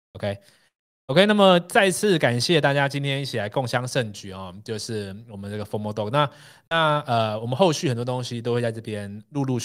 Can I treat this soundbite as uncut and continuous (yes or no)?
yes